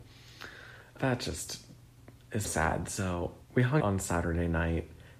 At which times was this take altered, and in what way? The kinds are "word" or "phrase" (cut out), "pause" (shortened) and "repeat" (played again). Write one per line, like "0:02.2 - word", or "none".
0:01.0 - phrase
0:02.4 - word
0:03.4 - pause
0:03.8 - word